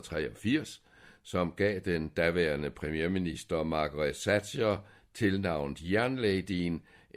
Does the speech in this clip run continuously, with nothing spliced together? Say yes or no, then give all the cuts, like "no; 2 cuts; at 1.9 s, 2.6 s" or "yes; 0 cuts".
yes; 0 cuts